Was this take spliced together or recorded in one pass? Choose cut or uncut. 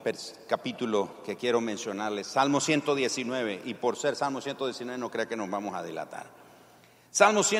uncut